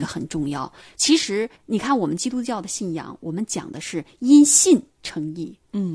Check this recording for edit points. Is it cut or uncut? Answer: cut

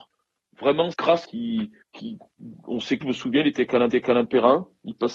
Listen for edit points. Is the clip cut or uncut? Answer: cut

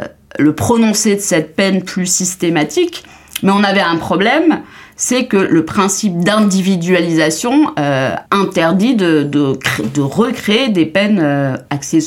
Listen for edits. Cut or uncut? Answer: cut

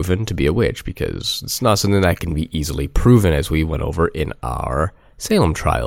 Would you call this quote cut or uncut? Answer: uncut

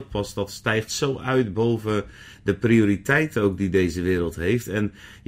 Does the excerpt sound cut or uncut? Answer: uncut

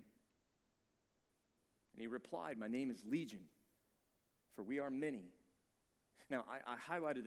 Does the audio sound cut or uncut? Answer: uncut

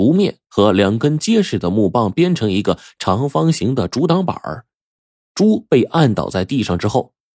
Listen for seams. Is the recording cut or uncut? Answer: uncut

